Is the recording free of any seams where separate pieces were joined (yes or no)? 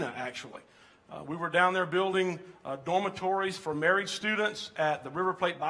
yes